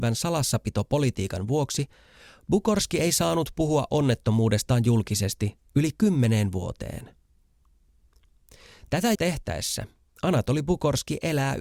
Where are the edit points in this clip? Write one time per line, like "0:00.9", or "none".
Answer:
0:09.1